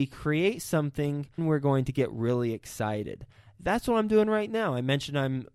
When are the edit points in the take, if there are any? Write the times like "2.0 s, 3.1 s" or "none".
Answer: 1.4 s